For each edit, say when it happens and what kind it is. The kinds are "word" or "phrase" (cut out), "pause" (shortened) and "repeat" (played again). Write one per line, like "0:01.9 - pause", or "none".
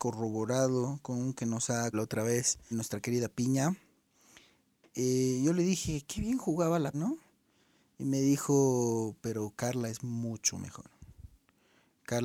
0:01.3 - word
0:01.9 - word
0:02.7 - word
0:06.9 - word